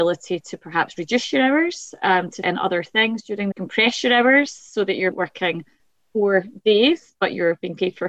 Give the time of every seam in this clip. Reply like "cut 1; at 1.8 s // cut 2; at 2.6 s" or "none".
cut 1; at 2.4 s // cut 2; at 3.5 s // cut 3; at 5.1 s